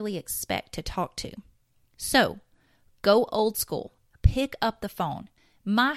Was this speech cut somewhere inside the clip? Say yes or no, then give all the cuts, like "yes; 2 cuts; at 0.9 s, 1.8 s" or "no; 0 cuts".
no; 0 cuts